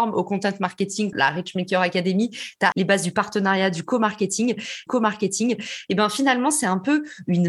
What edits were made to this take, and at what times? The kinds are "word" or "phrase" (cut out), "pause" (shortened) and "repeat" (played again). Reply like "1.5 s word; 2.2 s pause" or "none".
1.1 s word; 2.7 s word; 4.9 s repeat

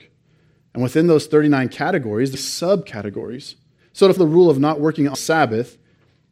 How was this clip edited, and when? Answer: 2.3 s phrase; 3.8 s pause; 4.2 s word; 5.1 s word

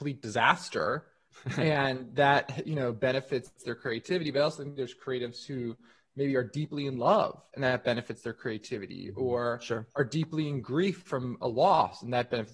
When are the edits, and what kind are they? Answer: none

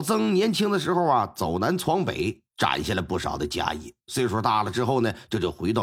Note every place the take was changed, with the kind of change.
2.5 s pause; 4.0 s pause

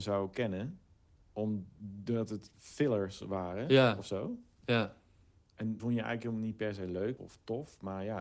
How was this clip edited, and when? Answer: 5.8 s word; 7.2 s word

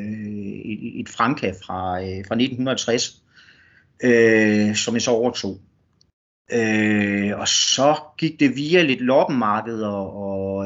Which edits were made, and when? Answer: none

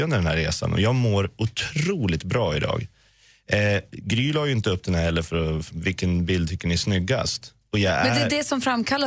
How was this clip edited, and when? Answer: 5.7 s word

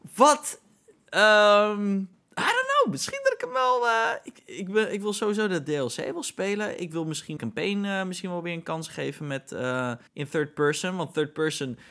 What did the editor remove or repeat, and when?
2.1 s pause; 7.4 s phrase; 10.1 s pause

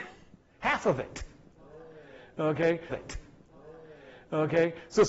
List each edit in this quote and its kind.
2.9 s repeat

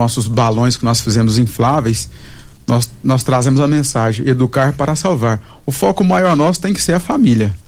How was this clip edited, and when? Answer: none

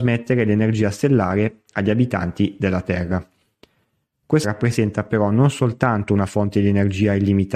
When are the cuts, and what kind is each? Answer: 4.4 s word

